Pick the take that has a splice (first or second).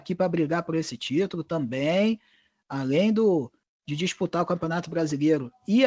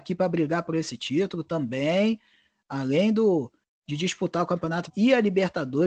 second